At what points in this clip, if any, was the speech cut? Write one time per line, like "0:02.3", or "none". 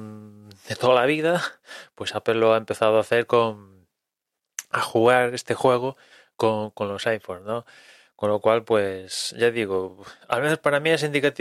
none